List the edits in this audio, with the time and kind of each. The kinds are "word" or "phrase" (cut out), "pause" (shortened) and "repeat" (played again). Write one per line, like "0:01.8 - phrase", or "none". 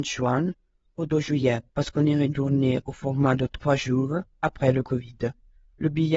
0:01.7 - pause